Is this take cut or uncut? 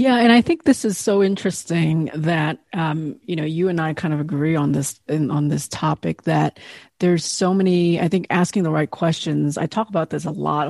uncut